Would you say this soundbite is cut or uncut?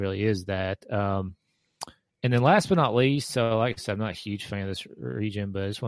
uncut